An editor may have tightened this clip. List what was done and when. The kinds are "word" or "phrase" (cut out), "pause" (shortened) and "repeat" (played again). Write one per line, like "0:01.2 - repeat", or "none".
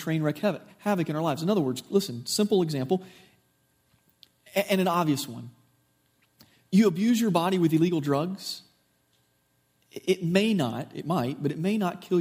none